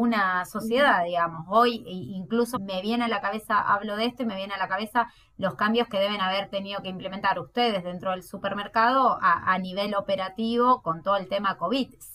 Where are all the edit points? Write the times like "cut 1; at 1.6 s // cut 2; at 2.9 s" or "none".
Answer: cut 1; at 2.5 s